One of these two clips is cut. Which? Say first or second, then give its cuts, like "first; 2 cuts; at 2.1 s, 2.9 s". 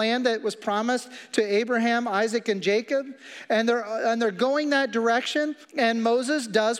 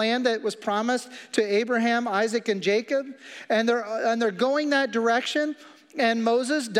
first; 1 cut; at 5.6 s